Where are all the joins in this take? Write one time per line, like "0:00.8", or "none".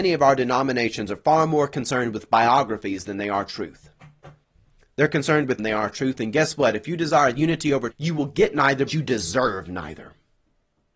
0:04.4
0:05.6
0:07.9
0:08.9